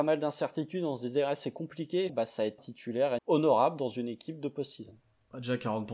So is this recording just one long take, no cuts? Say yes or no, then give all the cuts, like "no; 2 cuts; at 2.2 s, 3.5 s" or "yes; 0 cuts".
no; 3 cuts; at 2.1 s, 2.6 s, 3.2 s